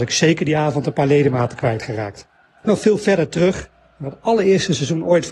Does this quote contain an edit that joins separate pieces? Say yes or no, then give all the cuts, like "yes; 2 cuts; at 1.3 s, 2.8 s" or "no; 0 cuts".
yes; 1 cut; at 2.6 s